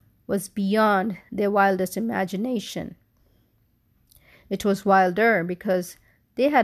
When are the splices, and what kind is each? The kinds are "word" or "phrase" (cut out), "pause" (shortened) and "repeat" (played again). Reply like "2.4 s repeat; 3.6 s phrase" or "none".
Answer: none